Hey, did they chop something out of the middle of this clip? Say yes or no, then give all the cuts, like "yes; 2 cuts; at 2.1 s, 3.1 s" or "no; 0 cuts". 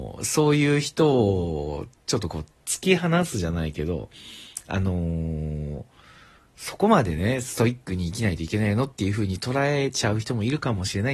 no; 0 cuts